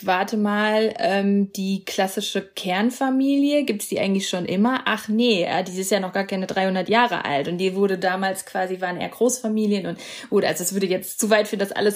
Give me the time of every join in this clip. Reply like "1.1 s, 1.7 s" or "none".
none

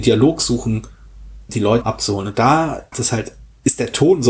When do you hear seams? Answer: 1.5 s, 1.8 s, 2.9 s

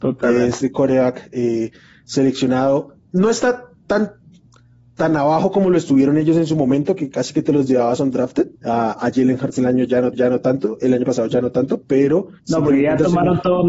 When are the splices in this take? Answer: 8.6 s, 10.1 s, 12.4 s

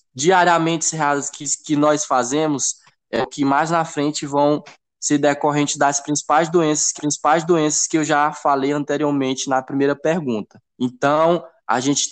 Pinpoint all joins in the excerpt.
7.0 s, 10.7 s

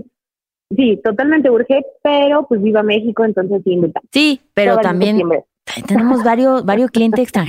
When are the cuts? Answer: 4.1 s

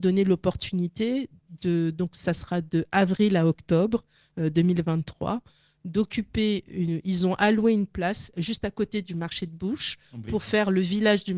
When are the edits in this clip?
none

